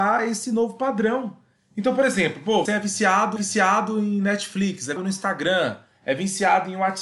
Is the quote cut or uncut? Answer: cut